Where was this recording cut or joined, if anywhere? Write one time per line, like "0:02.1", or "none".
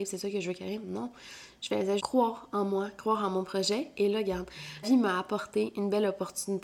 0:02.0
0:04.8